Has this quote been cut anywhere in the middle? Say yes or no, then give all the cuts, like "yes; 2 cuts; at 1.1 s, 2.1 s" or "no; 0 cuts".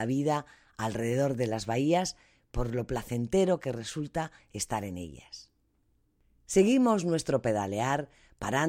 no; 0 cuts